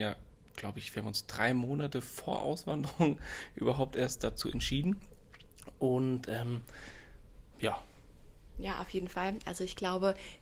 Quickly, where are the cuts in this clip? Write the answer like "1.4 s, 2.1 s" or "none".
none